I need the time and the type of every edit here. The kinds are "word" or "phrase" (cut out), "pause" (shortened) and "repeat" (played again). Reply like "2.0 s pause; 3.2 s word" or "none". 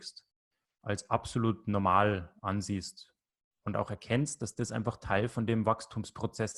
none